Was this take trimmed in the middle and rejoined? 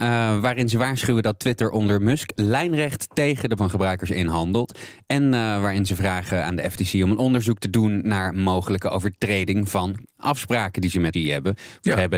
yes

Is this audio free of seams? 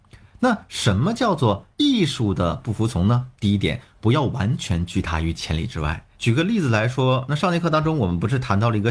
no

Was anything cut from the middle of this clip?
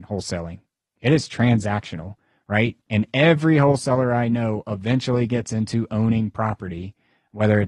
no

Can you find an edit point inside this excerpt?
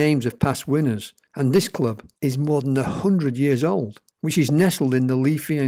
yes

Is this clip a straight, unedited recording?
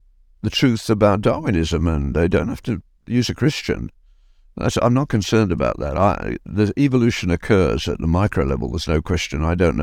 yes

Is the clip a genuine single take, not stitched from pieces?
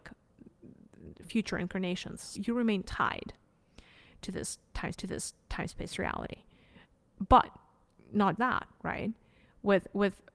no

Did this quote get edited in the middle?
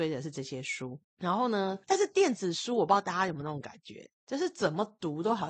yes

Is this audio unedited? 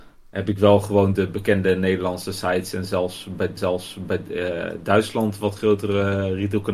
no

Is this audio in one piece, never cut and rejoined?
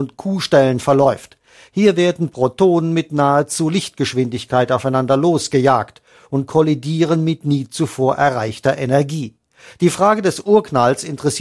yes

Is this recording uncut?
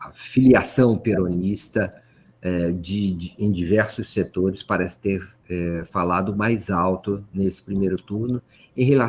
yes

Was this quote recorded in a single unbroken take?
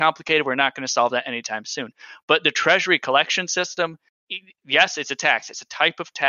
yes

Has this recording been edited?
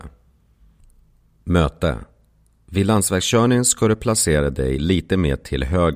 no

